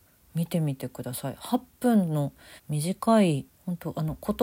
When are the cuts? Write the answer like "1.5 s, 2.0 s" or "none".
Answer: 2.6 s, 3.5 s